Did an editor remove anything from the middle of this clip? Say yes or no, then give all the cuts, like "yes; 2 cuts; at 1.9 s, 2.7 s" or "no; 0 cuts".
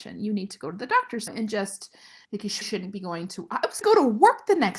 yes; 4 cuts; at 1.3 s, 2.2 s, 2.6 s, 3.8 s